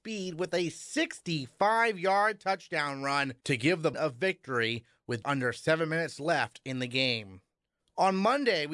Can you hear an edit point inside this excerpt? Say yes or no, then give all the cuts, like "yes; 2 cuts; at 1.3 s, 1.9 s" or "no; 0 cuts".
yes; 2 cuts; at 3.9 s, 5.2 s